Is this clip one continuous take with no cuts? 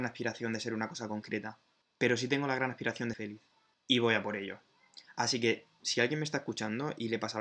no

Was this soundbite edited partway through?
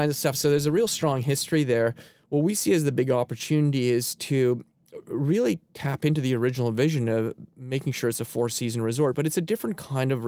no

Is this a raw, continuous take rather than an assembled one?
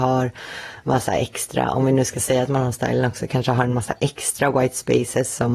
yes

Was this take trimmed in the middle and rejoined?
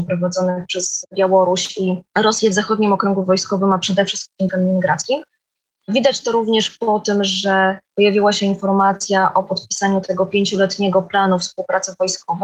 yes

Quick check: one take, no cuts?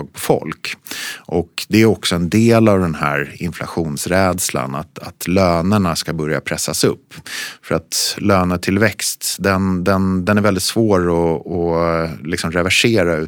yes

